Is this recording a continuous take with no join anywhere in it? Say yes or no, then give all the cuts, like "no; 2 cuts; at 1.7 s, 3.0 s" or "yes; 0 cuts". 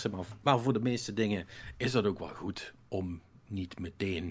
yes; 0 cuts